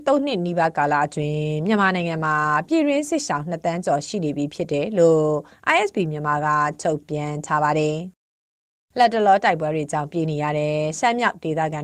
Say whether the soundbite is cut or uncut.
uncut